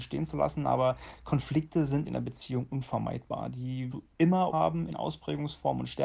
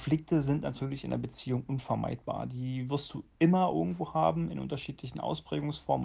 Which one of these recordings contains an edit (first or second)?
first